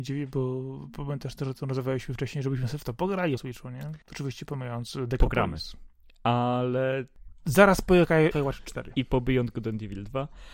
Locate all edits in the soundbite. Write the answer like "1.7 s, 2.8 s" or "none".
3.4 s, 4.0 s, 8.3 s